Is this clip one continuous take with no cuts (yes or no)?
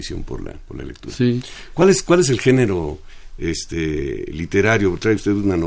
yes